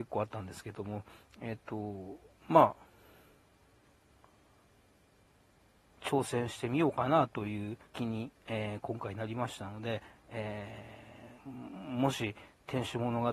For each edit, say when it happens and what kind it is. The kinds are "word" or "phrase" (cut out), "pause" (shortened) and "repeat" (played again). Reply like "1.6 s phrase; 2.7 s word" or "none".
7.9 s pause; 11.4 s pause

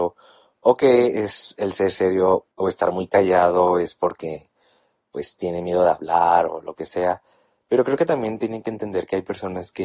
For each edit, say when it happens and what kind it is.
2.5 s pause

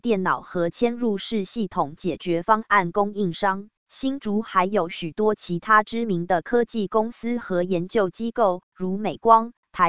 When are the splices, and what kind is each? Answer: 3.8 s pause

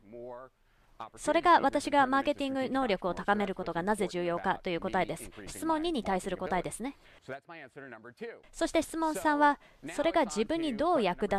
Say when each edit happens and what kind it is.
none

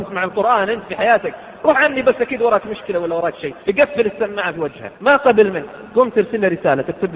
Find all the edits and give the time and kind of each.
3.6 s pause; 5.0 s pause

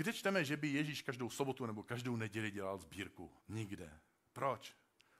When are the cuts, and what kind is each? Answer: 3.4 s pause

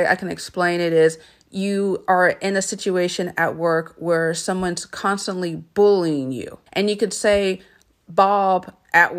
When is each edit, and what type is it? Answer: 1.2 s pause; 6.7 s pause

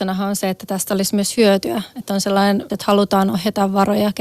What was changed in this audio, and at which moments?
2.7 s word

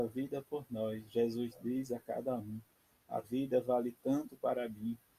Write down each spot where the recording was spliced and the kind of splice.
3.2 s word

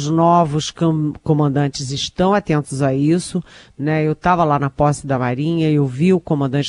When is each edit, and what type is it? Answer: none

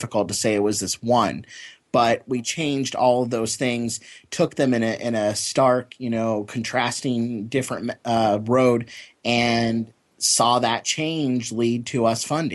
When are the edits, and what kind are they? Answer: none

